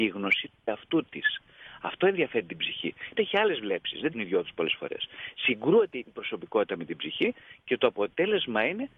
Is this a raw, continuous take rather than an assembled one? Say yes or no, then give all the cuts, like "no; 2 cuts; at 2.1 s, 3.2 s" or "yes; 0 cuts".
no; 2 cuts; at 3.1 s, 4.1 s